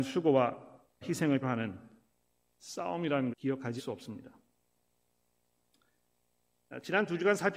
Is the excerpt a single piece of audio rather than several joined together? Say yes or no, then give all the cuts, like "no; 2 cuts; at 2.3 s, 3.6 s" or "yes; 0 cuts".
no; 4 cuts; at 1.0 s, 1.4 s, 3.3 s, 3.8 s